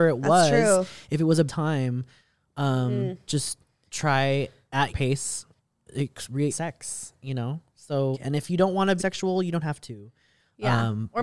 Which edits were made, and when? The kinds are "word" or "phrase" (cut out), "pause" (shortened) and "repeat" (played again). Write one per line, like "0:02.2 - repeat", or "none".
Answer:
0:01.5 - word
0:04.9 - word
0:05.9 - word
0:06.5 - word
0:08.1 - word
0:09.0 - word